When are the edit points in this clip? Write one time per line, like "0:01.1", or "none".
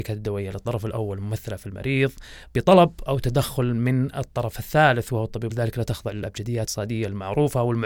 0:05.5
0:06.7